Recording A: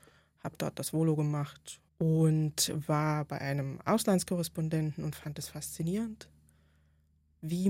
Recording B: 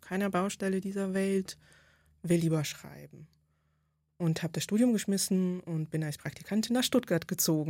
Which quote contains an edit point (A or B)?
A